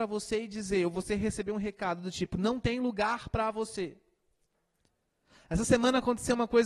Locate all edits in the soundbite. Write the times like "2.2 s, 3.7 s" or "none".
none